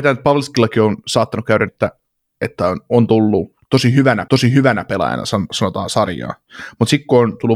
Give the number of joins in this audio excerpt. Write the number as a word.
two